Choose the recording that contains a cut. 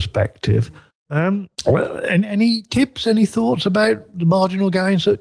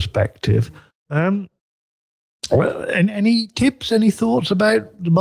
first; 1 cut; at 1.5 s

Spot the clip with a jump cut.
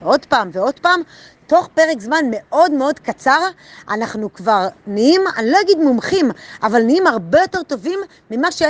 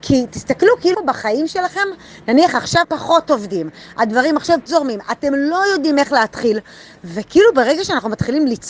second; 3 cuts; at 0.9 s, 2.8 s, 4.7 s

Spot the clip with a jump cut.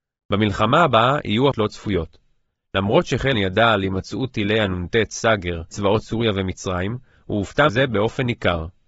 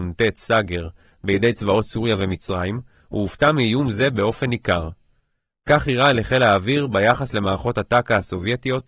first; 4 cuts; at 1.5 s, 3.3 s, 5.7 s, 7.7 s

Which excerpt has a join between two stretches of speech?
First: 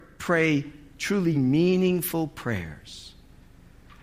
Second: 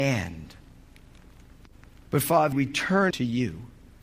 second; 2 cuts; at 2.5 s, 3.1 s

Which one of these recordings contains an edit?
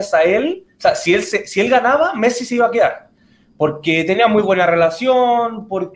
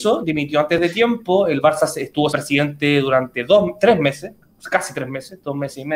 second; 1 cut; at 2.3 s

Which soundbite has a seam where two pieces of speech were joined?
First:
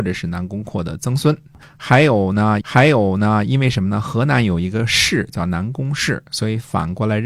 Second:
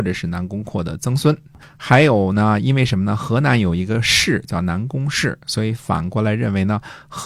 first; 1 cut; at 2.6 s

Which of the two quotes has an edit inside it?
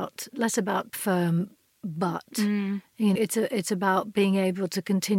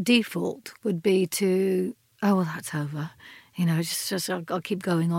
first; 2 cuts; at 0.9 s, 3.1 s

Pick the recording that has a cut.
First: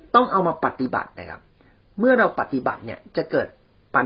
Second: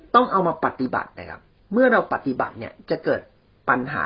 second; 1 cut; at 1.6 s

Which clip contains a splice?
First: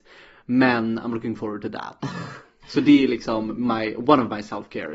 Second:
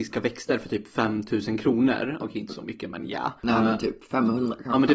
second; 1 cut; at 3.4 s

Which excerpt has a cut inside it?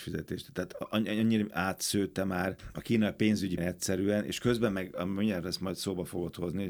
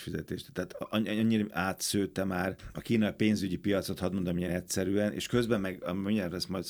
first; 1 cut; at 3.6 s

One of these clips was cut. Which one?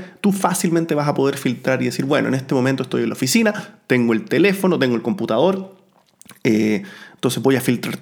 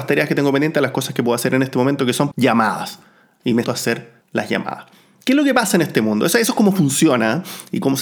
second; 3 cuts; at 2.3 s, 3.6 s, 4.2 s

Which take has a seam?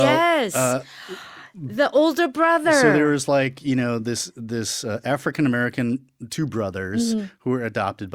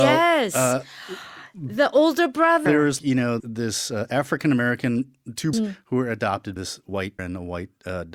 second; 6 cuts; at 2.7 s, 3.0 s, 3.4 s, 5.5 s, 6.6 s, 7.2 s

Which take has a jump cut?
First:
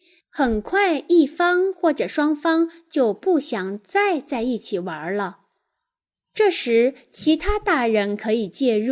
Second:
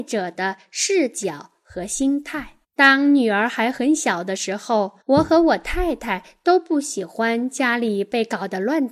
second; 2 cuts; at 2.6 s, 5.0 s

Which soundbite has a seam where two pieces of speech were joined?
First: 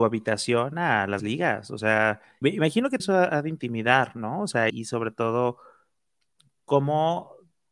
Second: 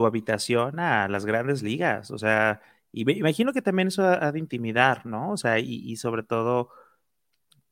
first; 4 cuts; at 1.2 s, 2.4 s, 3.0 s, 4.7 s

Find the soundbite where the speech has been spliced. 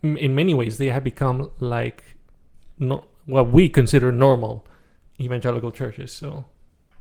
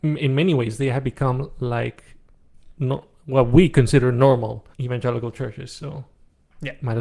second; 1 cut; at 4.7 s

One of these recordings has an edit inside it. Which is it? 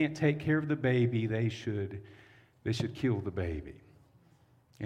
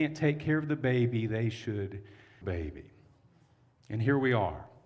second; 1 cut; at 2.4 s

